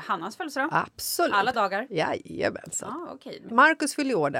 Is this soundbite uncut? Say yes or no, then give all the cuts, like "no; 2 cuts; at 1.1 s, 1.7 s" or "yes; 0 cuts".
no; 2 cuts; at 1.5 s, 3.5 s